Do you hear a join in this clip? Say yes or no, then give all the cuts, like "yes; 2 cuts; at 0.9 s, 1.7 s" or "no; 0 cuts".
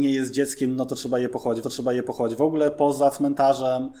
yes; 1 cut; at 1.6 s